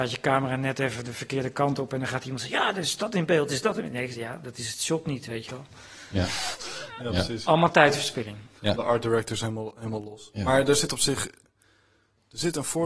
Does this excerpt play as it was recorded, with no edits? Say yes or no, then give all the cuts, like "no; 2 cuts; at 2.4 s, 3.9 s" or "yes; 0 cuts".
yes; 0 cuts